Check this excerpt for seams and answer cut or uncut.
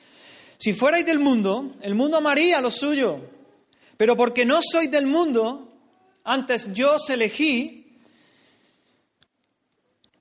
uncut